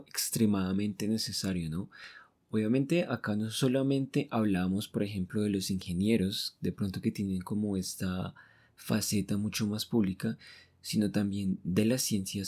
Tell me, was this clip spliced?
no; 0 cuts

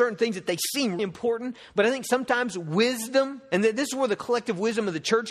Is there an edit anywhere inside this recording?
yes; 1 cut; at 1.0 s

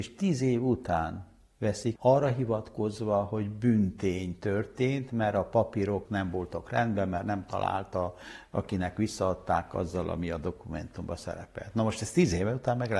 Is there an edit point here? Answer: yes; 2 cuts; at 2.0 s, 6.1 s

